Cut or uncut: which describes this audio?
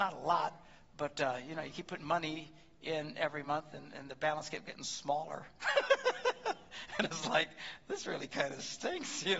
uncut